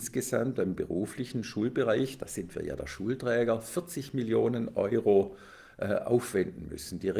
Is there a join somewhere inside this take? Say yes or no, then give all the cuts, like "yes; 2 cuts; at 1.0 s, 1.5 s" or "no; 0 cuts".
no; 0 cuts